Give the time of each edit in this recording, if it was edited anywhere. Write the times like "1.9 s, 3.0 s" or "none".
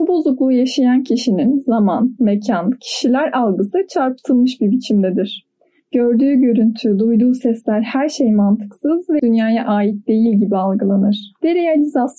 9.2 s